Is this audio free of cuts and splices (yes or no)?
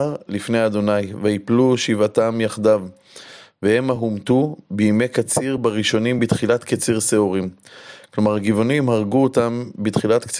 yes